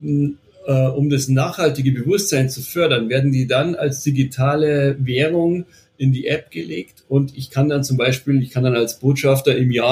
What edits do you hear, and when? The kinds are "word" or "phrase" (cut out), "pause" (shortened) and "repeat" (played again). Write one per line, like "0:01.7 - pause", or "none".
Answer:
none